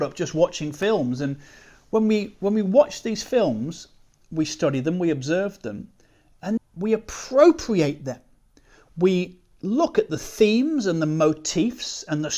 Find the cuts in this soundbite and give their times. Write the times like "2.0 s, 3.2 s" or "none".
6.6 s